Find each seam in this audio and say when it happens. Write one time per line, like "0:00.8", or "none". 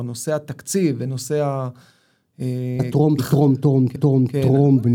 0:02.8
0:03.2
0:04.0